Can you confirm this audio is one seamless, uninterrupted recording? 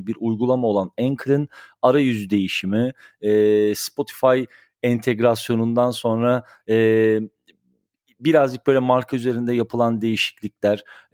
yes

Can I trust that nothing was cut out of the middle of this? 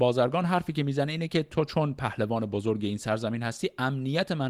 yes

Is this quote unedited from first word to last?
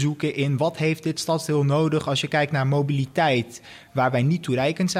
yes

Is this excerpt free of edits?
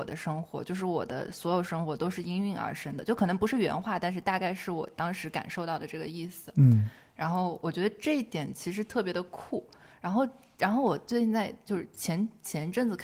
yes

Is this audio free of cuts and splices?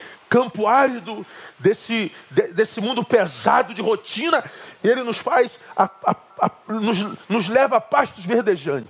no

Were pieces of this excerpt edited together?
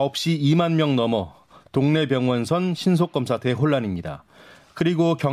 no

